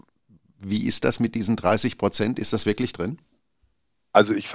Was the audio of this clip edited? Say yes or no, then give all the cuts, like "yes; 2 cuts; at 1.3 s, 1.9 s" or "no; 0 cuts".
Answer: no; 0 cuts